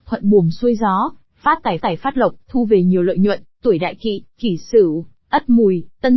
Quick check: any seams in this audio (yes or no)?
yes